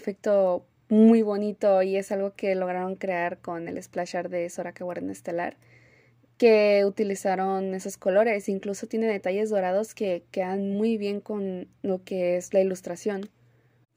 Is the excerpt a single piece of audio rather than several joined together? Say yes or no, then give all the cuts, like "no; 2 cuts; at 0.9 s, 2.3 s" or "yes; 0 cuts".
yes; 0 cuts